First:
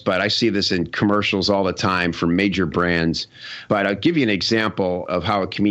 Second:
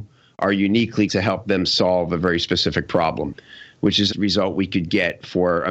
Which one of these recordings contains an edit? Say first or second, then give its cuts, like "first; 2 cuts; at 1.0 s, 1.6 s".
second; 2 cuts; at 1.1 s, 4.1 s